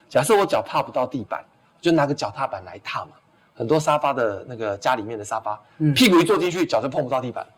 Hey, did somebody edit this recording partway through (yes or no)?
no